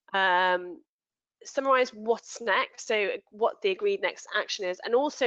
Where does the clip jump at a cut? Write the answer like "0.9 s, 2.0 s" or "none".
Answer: none